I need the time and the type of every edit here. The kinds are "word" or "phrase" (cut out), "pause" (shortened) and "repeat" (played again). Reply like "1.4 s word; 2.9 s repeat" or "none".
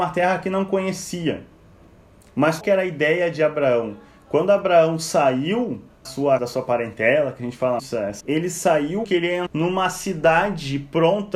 2.6 s word; 6.0 s word; 6.4 s word; 7.8 s word; 8.2 s word; 9.0 s word; 9.5 s word